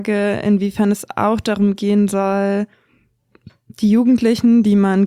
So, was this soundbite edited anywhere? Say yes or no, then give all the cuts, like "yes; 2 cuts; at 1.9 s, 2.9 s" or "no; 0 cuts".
no; 0 cuts